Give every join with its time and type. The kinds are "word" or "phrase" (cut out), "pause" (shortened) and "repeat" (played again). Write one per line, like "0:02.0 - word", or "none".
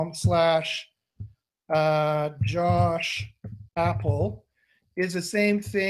0:03.7 - pause